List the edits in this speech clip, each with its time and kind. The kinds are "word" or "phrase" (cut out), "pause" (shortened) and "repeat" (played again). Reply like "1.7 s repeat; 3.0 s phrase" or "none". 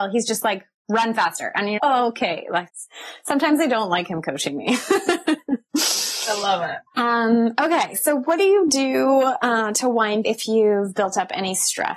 1.8 s word; 2.7 s word; 6.9 s pause; 10.2 s phrase